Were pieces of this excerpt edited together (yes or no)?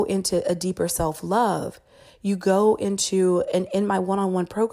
no